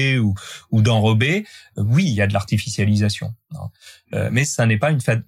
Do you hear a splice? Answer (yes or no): no